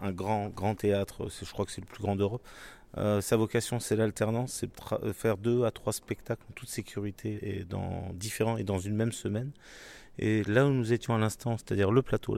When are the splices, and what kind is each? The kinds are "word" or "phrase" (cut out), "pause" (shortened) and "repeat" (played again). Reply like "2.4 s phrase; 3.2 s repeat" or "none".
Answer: 4.7 s word; 7.4 s word